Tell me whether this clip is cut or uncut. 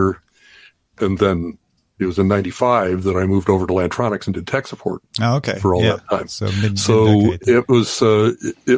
uncut